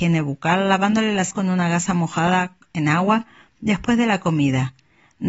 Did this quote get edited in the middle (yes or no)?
yes